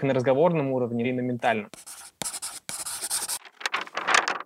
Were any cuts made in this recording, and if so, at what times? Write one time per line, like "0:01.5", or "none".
0:01.0